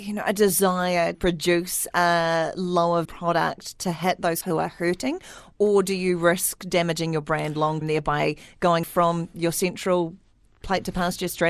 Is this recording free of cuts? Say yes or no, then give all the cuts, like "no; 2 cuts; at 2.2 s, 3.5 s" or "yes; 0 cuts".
no; 5 cuts; at 1.1 s, 3.0 s, 4.4 s, 7.8 s, 8.8 s